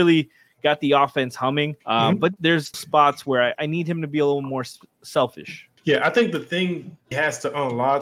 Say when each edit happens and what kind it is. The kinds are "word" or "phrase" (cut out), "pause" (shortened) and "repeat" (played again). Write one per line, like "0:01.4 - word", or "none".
0:01.8 - pause
0:02.4 - word
0:02.7 - word
0:03.5 - word
0:05.8 - pause
0:07.1 - word